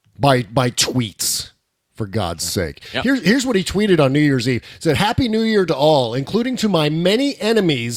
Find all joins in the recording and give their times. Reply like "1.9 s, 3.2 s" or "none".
none